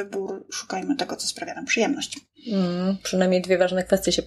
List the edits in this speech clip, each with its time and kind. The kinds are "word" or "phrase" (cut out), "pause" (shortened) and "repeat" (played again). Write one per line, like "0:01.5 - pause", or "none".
none